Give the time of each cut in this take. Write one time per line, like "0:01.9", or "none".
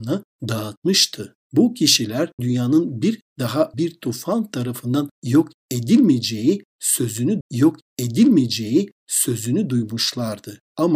0:02.4
0:03.7
0:07.4